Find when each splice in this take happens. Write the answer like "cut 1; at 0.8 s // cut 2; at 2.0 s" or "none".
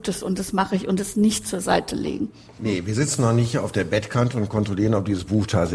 none